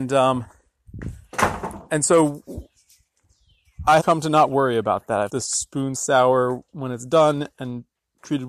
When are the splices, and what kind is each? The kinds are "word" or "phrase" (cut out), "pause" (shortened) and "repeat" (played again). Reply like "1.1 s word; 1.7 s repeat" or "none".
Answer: 4.0 s word; 5.3 s phrase; 5.9 s word